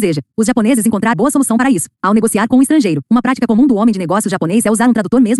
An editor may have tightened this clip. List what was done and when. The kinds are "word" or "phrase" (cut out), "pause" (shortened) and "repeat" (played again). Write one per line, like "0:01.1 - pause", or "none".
0:01.1 - word